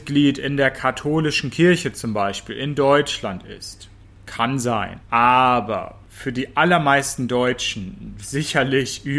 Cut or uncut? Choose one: uncut